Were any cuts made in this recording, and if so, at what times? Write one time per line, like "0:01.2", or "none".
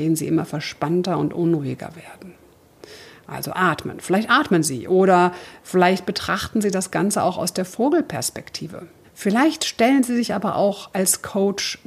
0:09.0